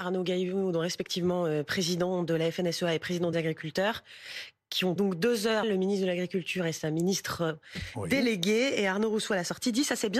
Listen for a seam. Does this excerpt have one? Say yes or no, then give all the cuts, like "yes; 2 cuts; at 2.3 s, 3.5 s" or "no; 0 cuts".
yes; 3 cuts; at 3.3 s, 5.0 s, 5.6 s